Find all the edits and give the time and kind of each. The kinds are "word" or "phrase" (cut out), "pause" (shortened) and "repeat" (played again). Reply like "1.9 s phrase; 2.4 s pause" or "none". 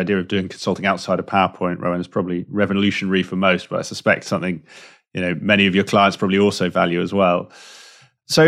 none